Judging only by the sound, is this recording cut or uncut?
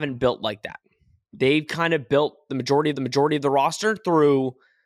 cut